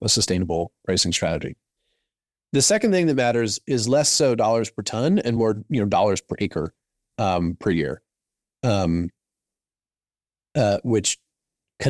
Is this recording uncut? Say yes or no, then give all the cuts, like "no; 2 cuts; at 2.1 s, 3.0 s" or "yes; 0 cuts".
yes; 0 cuts